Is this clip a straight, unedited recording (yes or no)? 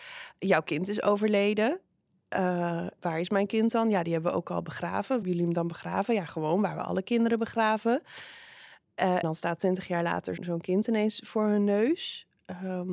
no